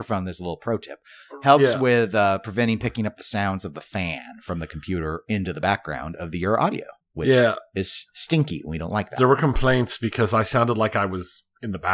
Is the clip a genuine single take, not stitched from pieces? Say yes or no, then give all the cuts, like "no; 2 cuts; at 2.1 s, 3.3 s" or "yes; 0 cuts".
no; 1 cut; at 7.0 s